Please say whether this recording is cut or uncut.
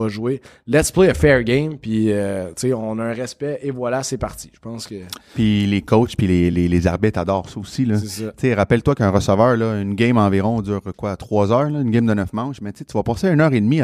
uncut